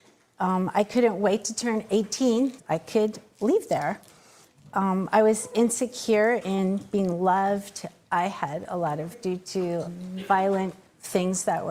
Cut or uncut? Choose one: cut